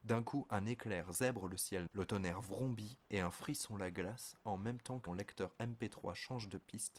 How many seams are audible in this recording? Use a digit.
2